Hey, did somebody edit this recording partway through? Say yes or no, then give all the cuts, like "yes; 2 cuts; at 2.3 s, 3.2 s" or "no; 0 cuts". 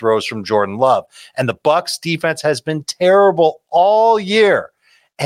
no; 0 cuts